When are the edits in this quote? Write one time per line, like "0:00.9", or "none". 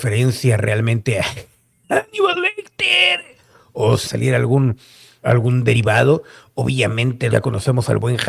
0:04.0
0:05.2
0:07.3